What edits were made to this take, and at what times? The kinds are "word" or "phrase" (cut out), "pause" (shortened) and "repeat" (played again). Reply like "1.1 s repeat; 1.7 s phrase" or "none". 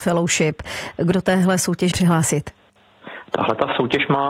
1.1 s word; 1.9 s word